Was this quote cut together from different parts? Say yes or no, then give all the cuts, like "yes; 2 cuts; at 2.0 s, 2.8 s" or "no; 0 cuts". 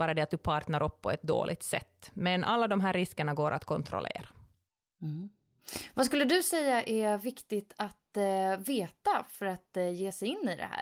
no; 0 cuts